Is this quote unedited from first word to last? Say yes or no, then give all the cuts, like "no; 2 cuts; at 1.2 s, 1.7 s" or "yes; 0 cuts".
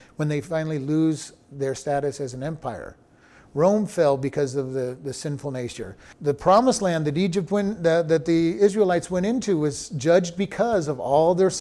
yes; 0 cuts